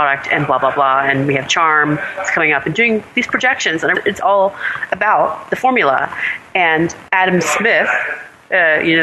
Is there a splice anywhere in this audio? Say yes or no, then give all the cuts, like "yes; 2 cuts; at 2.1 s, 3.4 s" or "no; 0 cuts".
yes; 2 cuts; at 3.9 s, 7.1 s